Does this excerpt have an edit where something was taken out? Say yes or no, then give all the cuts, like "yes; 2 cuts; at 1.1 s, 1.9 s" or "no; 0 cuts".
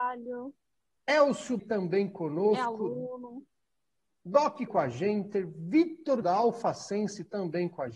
yes; 3 cuts; at 1.6 s, 4.7 s, 6.2 s